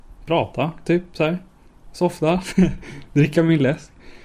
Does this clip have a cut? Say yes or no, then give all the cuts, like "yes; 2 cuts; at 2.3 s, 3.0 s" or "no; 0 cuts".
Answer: no; 0 cuts